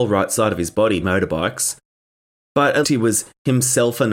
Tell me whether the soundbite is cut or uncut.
cut